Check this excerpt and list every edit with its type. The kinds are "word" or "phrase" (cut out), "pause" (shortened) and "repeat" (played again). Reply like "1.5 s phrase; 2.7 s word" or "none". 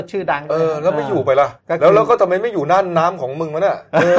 1.6 s pause